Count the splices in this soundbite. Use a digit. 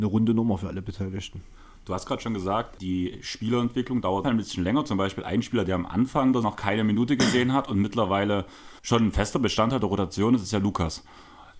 4